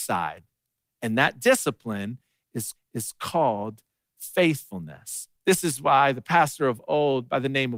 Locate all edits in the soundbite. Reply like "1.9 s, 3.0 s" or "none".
2.8 s, 5.4 s